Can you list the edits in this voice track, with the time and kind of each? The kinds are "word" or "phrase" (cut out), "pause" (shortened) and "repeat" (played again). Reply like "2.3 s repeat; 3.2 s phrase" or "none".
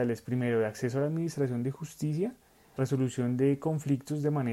2.8 s word